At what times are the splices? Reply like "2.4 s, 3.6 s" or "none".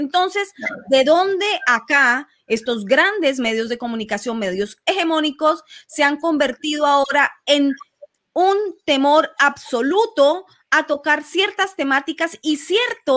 none